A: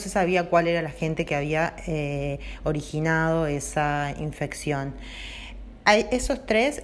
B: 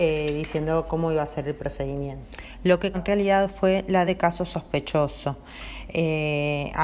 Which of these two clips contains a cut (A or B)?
B